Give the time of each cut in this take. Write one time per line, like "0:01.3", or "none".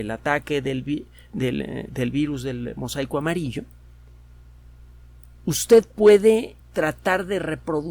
0:01.9
0:06.6